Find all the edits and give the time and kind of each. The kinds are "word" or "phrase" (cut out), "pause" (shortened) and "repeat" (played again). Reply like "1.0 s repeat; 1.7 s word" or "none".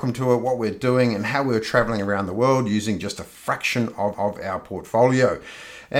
4.1 s repeat